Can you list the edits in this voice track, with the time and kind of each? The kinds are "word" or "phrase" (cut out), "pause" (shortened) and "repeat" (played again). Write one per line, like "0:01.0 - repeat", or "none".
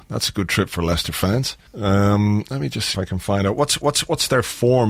0:01.7 - pause
0:02.9 - word
0:03.8 - repeat